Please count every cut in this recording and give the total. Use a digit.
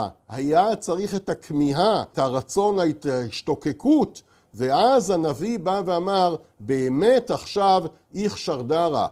1